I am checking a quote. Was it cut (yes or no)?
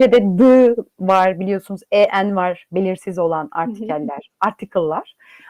no